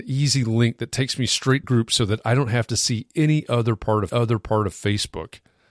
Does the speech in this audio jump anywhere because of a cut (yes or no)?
yes